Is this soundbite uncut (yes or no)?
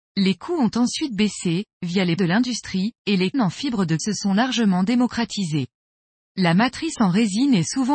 no